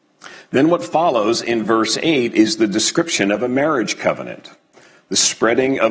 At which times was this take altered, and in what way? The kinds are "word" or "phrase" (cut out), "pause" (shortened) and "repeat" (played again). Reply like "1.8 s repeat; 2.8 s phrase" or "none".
none